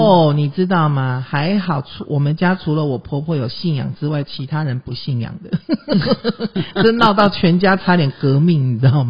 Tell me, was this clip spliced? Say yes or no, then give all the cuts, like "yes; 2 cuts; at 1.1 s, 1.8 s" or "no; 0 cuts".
no; 0 cuts